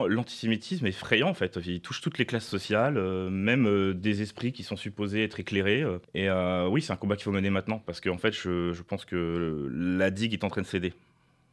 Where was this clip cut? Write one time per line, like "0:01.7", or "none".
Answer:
0:06.0